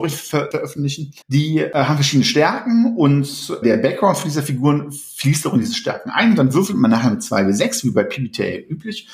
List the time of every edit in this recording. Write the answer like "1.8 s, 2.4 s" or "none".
1.2 s, 3.6 s